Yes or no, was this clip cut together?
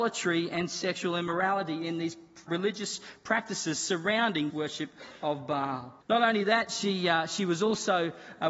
yes